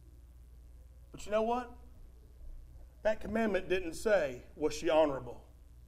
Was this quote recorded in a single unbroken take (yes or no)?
yes